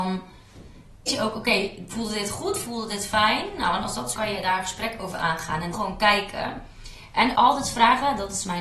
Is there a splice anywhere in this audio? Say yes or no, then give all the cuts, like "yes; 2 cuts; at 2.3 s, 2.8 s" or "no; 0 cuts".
yes; 4 cuts; at 1.1 s, 4.1 s, 5.7 s, 7.3 s